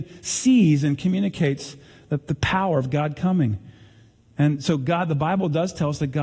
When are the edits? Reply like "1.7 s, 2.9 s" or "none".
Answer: none